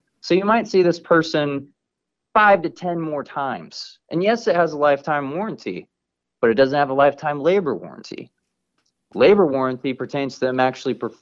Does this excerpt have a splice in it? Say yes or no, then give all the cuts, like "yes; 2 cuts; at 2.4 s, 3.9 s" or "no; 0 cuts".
no; 0 cuts